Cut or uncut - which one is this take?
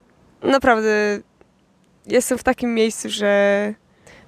uncut